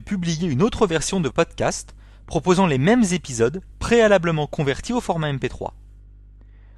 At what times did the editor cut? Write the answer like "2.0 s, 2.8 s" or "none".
1.3 s